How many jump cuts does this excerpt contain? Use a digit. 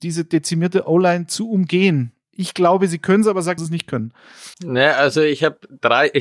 2